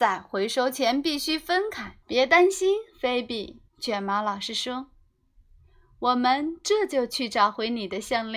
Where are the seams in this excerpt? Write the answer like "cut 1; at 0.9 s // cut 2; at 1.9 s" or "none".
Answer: cut 1; at 2.0 s // cut 2; at 3.7 s